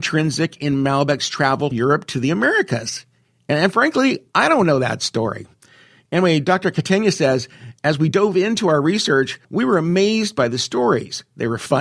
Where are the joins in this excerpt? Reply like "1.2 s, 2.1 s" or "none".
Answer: 1.7 s, 9.4 s

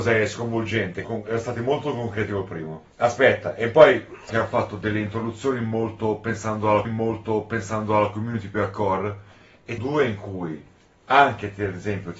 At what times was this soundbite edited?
1.0 s, 2.9 s, 4.3 s, 6.8 s, 9.8 s

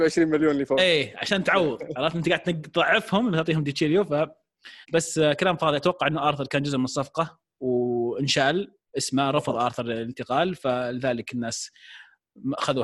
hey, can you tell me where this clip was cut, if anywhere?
4.8 s

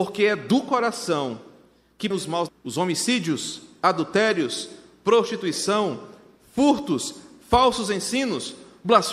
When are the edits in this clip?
2.1 s, 2.5 s

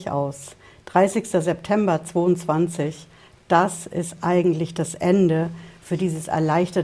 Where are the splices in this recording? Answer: none

